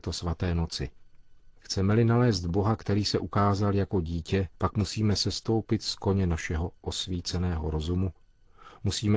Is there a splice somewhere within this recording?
yes; 2 cuts; at 1.6 s, 4.5 s

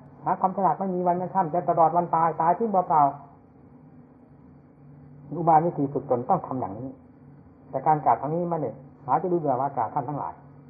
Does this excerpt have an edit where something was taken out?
yes; 1 cut; at 8.9 s

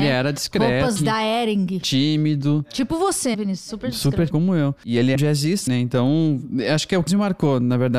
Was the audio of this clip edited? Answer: yes; 6 cuts; at 1.0 s, 3.3 s, 4.3 s, 5.1 s, 5.7 s, 7.1 s

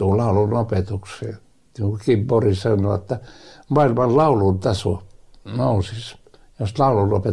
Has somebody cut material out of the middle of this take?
no; 0 cuts

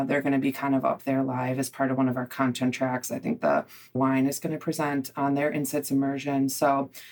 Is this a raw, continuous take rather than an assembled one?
no; 1 cut; at 3.9 s

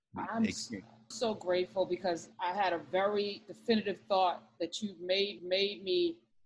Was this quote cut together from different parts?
yes; 3 cuts; at 1.1 s, 2.3 s, 5.4 s

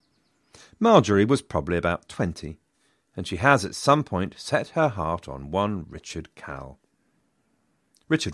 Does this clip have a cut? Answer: no; 0 cuts

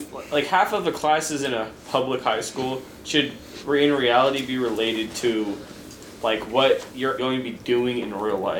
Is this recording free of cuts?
no; 1 cut; at 7.2 s

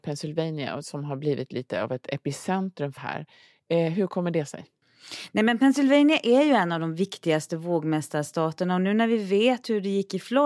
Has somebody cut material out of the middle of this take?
yes; 1 cut; at 3.0 s

